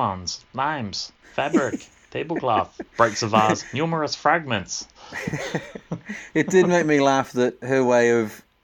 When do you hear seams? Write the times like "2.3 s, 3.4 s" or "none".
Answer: 2.9 s